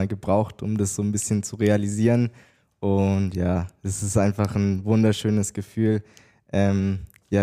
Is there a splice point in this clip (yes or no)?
no